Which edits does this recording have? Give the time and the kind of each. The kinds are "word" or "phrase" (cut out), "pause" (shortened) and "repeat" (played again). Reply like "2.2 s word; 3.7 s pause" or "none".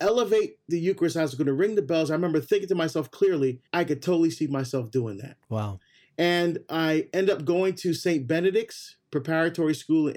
3.7 s pause; 5.4 s pause